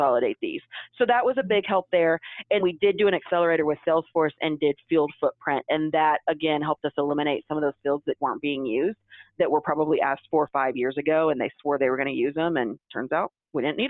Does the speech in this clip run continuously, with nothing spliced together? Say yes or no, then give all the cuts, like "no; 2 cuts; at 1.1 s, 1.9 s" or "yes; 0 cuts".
no; 2 cuts; at 2.6 s, 8.2 s